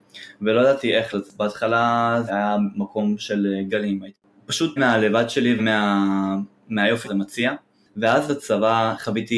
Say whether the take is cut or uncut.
cut